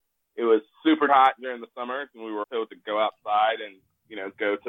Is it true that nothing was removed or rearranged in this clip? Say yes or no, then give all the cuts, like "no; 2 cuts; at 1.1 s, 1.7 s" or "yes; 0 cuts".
no; 2 cuts; at 1.1 s, 2.4 s